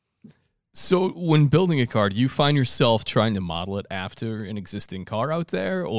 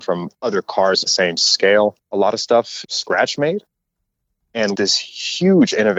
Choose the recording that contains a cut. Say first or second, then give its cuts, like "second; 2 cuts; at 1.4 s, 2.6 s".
second; 4 cuts; at 1.1 s, 2.0 s, 2.8 s, 4.7 s